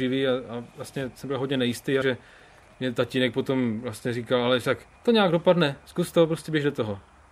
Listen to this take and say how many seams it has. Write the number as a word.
two